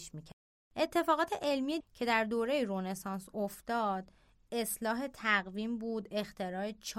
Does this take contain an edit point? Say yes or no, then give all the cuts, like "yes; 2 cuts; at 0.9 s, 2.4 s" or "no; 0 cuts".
yes; 1 cut; at 1.8 s